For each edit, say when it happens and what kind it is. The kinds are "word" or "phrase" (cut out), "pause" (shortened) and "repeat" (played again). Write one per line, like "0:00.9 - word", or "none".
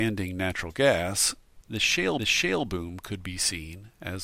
0:01.6 - word
0:02.2 - repeat

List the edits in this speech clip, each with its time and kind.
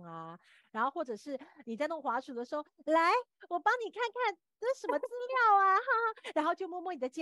none

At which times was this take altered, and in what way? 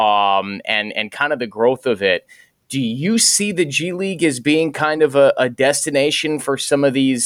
none

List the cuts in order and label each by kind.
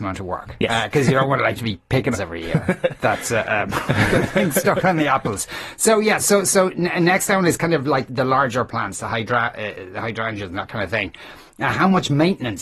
0:02.1 - phrase
0:06.2 - word
0:08.1 - word

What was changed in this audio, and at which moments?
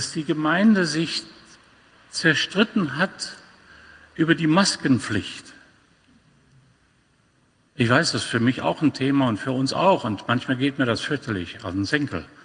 none

